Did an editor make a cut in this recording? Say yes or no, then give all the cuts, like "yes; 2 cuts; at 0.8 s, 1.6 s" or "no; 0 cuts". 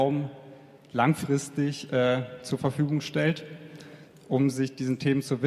no; 0 cuts